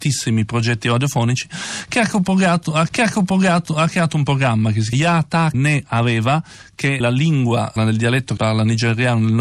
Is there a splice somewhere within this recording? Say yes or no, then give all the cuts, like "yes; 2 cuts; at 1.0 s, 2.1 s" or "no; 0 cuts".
yes; 6 cuts; at 2.9 s, 4.9 s, 5.5 s, 7.0 s, 7.8 s, 8.4 s